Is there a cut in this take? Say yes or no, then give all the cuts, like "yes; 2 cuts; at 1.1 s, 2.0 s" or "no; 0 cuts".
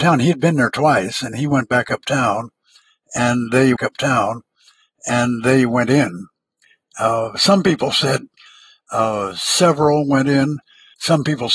yes; 1 cut; at 3.8 s